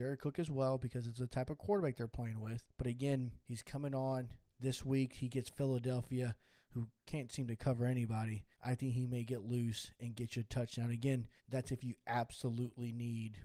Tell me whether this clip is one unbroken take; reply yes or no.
no